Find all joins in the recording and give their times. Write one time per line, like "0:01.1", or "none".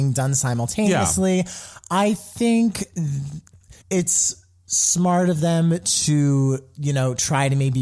0:03.8